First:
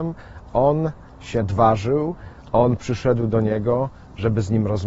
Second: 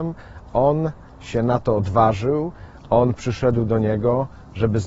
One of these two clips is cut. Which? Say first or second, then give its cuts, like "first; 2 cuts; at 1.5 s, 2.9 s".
first; 1 cut; at 1.4 s